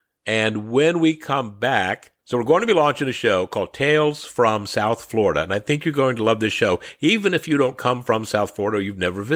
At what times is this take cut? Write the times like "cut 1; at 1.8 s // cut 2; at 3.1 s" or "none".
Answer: cut 1; at 2.2 s